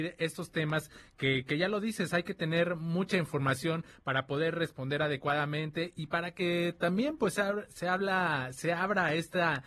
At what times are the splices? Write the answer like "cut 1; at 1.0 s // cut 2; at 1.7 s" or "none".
none